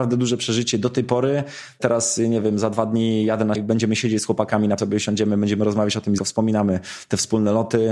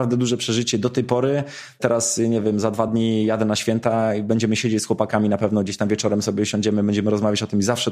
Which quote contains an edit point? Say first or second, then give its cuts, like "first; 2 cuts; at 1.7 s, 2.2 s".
first; 3 cuts; at 3.5 s, 4.8 s, 6.2 s